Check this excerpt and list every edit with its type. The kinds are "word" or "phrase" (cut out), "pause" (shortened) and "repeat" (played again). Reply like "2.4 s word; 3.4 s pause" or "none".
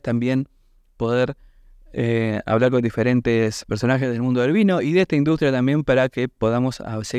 none